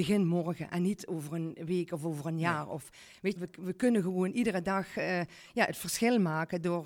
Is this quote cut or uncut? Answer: cut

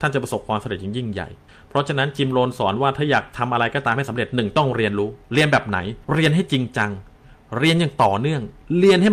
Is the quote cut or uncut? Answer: cut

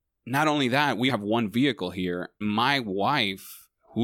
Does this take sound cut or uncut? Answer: cut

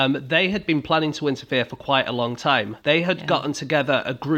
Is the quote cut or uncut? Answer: cut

